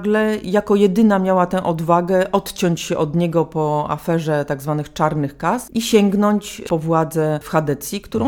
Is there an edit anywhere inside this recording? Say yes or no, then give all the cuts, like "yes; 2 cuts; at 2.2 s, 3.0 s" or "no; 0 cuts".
no; 0 cuts